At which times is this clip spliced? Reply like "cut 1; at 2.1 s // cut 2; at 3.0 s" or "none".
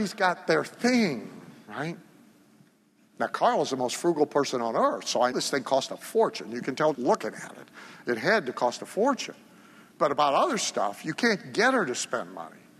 cut 1; at 5.3 s // cut 2; at 6.9 s